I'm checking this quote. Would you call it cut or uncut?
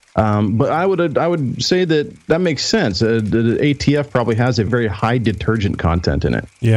cut